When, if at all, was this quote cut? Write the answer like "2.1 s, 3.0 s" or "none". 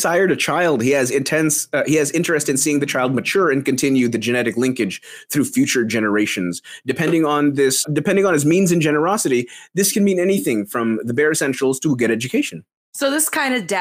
7.8 s